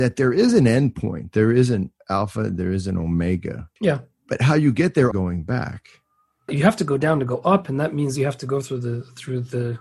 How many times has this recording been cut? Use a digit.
3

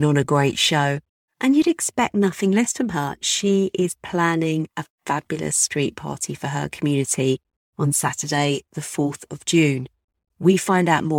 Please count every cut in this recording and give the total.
0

